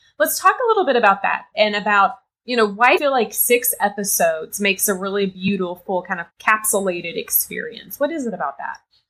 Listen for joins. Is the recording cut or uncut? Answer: cut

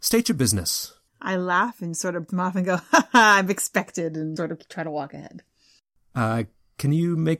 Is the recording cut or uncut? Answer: cut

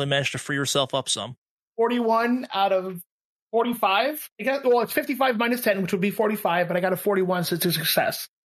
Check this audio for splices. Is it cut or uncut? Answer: uncut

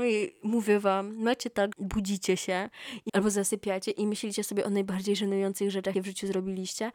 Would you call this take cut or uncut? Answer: cut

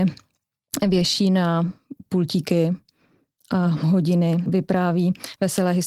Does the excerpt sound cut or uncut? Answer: uncut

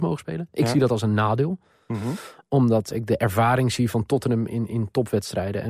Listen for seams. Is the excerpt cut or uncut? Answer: cut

